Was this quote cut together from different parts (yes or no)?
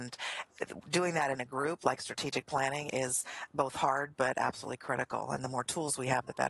no